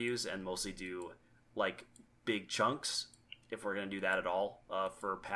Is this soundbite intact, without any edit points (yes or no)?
no